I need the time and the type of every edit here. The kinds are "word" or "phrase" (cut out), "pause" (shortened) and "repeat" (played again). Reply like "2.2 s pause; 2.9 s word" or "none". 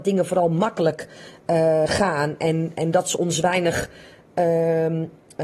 1.9 s word